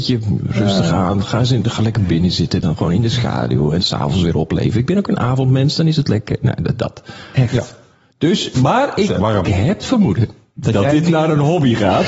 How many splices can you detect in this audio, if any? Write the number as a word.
six